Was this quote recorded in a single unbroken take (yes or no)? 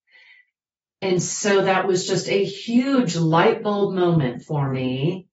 yes